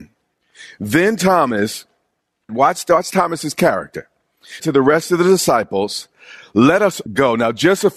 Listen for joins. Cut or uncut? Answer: cut